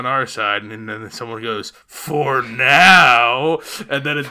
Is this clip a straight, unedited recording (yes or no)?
no